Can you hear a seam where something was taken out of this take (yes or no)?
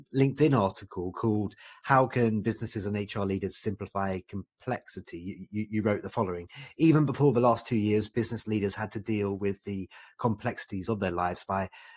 no